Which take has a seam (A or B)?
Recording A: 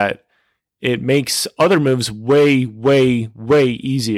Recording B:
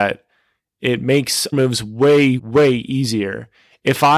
B